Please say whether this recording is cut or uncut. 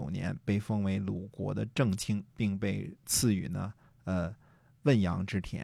cut